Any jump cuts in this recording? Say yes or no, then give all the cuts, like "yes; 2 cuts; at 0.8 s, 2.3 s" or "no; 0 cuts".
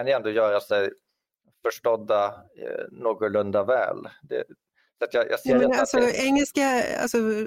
no; 0 cuts